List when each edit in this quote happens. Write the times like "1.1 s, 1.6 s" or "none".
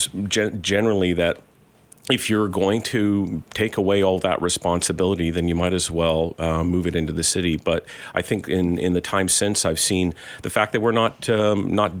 none